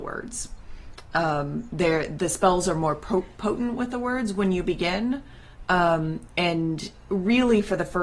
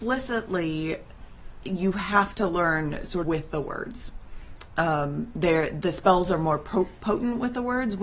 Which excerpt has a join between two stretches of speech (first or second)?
second